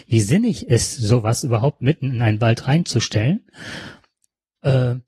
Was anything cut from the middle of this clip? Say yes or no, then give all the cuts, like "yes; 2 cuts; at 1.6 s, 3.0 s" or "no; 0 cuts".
no; 0 cuts